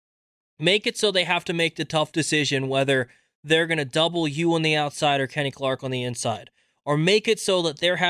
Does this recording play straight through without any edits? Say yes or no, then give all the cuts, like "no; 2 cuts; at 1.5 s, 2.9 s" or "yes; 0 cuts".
yes; 0 cuts